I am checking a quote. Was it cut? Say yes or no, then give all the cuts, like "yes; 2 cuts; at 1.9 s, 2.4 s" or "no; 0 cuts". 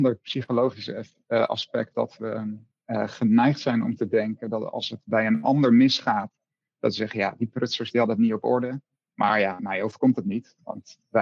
yes; 1 cut; at 1.9 s